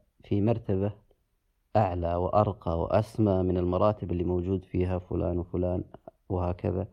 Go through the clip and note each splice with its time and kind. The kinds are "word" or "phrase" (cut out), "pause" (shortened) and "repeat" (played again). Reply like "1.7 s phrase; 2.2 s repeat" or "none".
none